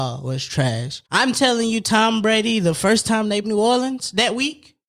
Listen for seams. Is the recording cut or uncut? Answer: cut